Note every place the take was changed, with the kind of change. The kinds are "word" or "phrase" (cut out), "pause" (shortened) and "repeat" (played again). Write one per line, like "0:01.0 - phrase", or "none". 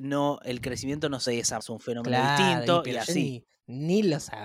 0:01.3 - word
0:01.6 - word